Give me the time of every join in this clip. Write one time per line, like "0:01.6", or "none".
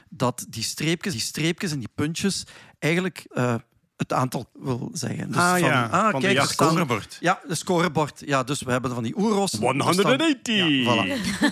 0:01.1
0:03.3
0:04.5